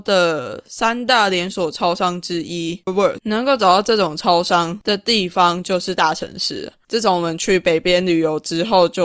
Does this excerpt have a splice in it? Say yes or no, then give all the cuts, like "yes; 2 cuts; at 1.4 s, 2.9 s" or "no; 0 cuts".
yes; 2 cuts; at 2.9 s, 3.2 s